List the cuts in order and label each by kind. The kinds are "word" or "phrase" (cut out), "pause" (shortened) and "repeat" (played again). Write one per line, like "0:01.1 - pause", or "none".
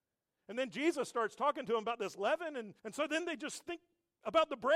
0:02.8 - pause